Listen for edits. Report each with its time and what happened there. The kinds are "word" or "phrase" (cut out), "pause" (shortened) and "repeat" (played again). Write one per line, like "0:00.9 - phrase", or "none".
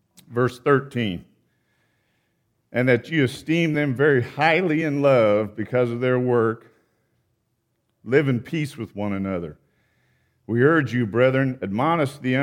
none